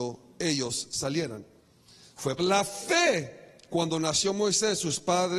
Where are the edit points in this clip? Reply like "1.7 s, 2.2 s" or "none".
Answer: 2.4 s, 3.7 s